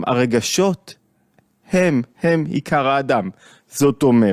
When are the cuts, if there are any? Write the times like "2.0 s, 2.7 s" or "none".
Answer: none